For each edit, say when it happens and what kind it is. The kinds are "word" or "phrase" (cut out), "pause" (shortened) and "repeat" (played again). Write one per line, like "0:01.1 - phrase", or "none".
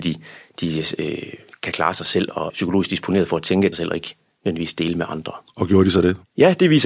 0:02.5 - word
0:03.7 - phrase